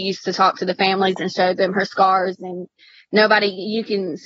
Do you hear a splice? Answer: no; 0 cuts

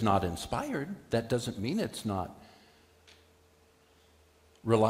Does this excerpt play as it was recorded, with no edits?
yes; 0 cuts

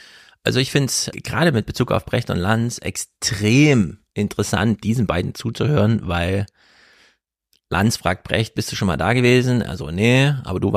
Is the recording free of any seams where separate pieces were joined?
yes; 0 cuts

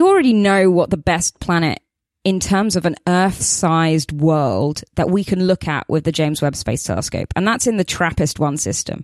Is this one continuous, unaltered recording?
yes; 0 cuts

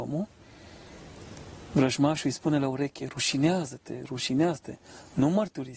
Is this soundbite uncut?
yes; 0 cuts

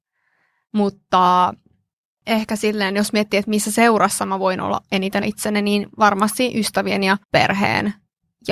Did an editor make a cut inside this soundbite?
yes; 2 cuts; at 5.2 s, 7.2 s

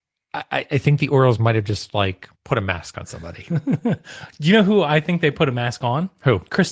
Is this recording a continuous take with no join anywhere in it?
no; 1 cut; at 2.4 s

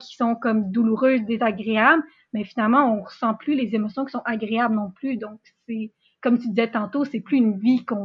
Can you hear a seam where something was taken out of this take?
no; 0 cuts

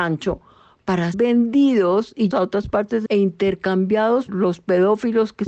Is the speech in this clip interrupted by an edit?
yes; 4 cuts; at 1.1 s, 2.3 s, 3.1 s, 4.3 s

